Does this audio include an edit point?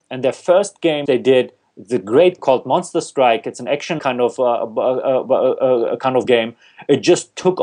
yes; 4 cuts; at 1.1 s, 2.4 s, 4.0 s, 6.2 s

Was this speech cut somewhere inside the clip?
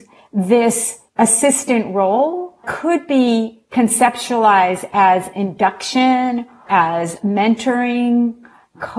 yes; 3 cuts; at 1.1 s, 2.6 s, 6.7 s

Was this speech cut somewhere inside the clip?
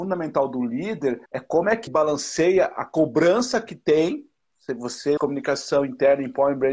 yes; 3 cuts; at 1.3 s, 1.9 s, 5.2 s

